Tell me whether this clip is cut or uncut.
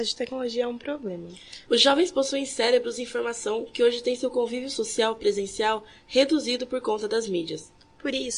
uncut